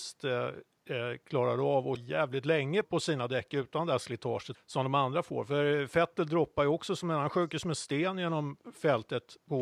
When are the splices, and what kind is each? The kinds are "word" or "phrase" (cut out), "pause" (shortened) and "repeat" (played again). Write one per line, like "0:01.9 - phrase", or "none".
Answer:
0:02.0 - word
0:02.8 - word
0:04.5 - word